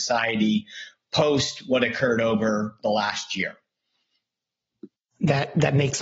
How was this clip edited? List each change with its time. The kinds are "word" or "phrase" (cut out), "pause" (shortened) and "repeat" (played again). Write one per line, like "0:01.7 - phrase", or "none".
none

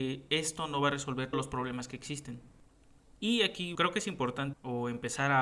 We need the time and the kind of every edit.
0:01.3 - word
0:03.7 - word
0:04.5 - word

